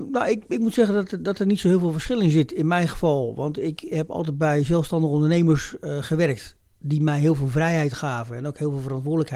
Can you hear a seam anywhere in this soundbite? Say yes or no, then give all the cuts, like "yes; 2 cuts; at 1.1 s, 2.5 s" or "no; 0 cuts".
no; 0 cuts